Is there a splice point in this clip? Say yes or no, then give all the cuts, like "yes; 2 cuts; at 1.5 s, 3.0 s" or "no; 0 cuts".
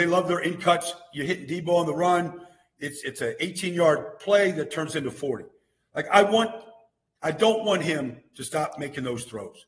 no; 0 cuts